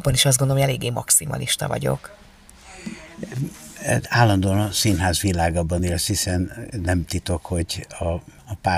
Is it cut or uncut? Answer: uncut